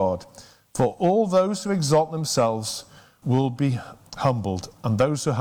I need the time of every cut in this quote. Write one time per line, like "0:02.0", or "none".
0:03.2